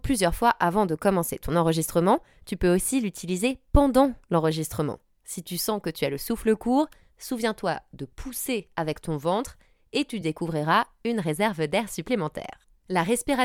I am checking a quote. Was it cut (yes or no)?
no